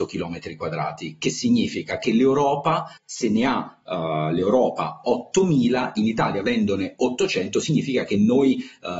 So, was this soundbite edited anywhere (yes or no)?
yes